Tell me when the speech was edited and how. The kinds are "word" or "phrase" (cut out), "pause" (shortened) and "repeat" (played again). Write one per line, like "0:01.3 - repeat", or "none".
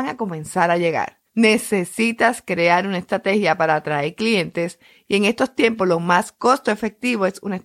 0:01.3 - pause